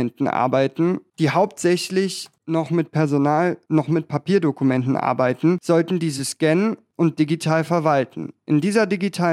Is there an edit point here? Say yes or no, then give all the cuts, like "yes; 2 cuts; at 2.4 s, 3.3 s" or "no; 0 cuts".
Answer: no; 0 cuts